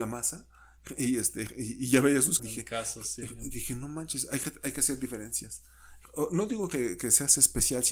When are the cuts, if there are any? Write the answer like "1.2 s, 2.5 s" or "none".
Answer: 2.4 s